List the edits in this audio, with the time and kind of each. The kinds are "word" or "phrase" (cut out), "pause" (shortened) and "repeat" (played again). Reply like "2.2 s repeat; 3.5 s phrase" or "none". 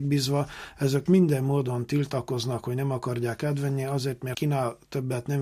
1.1 s word; 4.3 s word